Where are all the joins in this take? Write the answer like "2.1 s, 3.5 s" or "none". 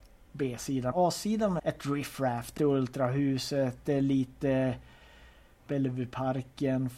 0.9 s, 1.6 s, 2.6 s, 5.7 s